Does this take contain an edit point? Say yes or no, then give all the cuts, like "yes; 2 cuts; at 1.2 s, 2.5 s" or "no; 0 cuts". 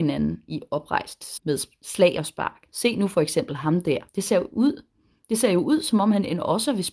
yes; 3 cuts; at 1.4 s, 2.7 s, 4.1 s